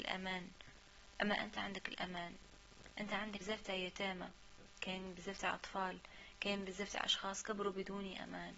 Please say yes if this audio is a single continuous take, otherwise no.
no